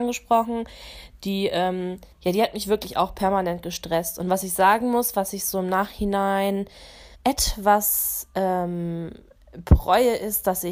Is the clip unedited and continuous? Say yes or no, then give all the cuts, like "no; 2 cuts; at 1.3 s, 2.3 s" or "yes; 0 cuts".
no; 2 cuts; at 2.1 s, 7.1 s